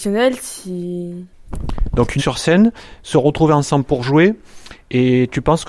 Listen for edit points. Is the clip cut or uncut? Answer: cut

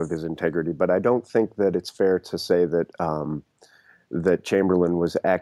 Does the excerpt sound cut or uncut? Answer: uncut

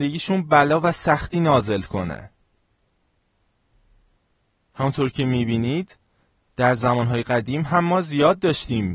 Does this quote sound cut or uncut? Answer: uncut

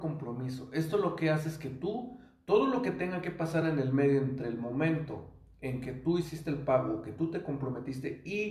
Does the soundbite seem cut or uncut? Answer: uncut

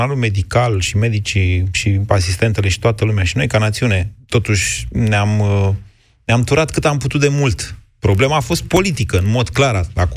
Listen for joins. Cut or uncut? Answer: uncut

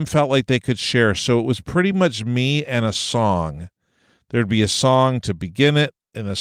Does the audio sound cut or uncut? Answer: uncut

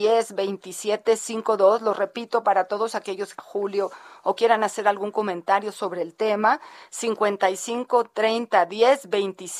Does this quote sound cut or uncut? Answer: cut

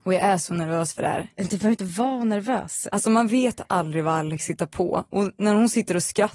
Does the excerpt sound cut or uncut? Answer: uncut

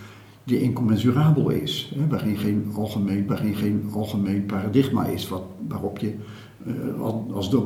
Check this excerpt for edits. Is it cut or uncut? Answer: cut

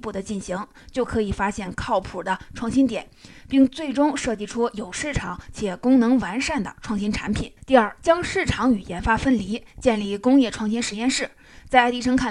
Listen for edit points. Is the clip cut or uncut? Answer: cut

